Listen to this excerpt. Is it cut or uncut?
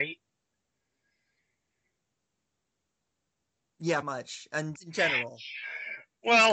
cut